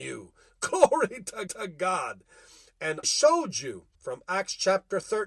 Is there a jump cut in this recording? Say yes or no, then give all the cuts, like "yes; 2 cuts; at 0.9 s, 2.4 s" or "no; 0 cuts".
yes; 3 cuts; at 1.5 s, 3.0 s, 3.9 s